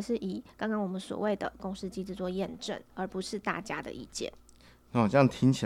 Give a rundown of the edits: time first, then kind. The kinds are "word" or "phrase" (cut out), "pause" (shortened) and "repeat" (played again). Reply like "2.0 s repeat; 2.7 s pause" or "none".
none